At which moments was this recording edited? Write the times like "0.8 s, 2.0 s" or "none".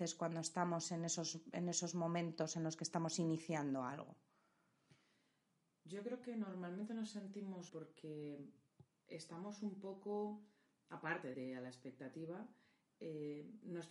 7.7 s, 11.3 s